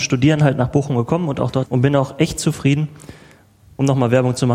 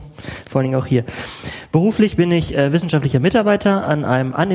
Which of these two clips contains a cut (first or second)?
first